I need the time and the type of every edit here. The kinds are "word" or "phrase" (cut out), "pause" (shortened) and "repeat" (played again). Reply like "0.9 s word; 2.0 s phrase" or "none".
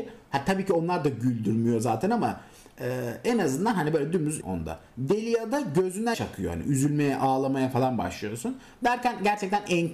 4.4 s phrase; 6.1 s word